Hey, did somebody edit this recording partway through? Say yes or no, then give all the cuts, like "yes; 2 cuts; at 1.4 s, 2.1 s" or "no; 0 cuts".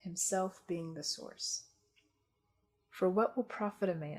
no; 0 cuts